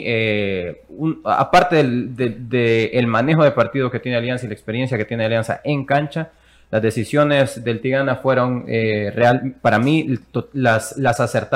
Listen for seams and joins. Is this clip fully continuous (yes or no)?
yes